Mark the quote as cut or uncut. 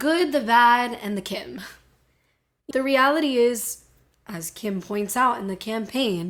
cut